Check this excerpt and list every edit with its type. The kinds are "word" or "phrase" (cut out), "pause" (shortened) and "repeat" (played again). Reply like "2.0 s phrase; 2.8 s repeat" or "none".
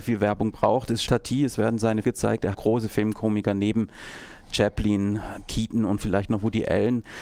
1.1 s word; 2.0 s word; 2.5 s phrase